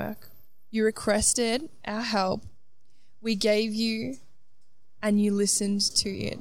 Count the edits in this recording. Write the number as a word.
one